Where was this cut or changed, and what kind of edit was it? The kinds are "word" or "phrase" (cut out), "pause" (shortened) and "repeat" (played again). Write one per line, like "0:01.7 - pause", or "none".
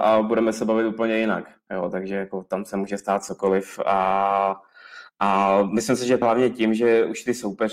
0:06.2 - word